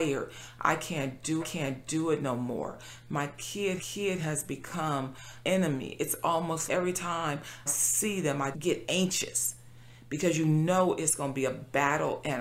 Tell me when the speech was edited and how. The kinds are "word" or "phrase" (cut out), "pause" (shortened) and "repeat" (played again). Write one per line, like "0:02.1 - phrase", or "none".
0:01.4 - repeat
0:03.8 - repeat
0:05.4 - word
0:06.7 - word
0:07.7 - word
0:08.5 - word